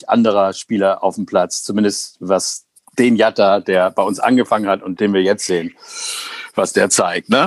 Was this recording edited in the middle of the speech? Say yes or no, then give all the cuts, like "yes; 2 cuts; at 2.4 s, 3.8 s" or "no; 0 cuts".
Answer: yes; 2 cuts; at 2.8 s, 5.0 s